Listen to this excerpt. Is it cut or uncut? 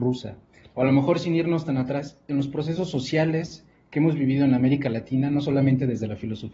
uncut